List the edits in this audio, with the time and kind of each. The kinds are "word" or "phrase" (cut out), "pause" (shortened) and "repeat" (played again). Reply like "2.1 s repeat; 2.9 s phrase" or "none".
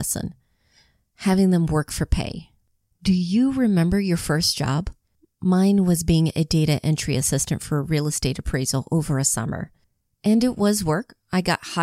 none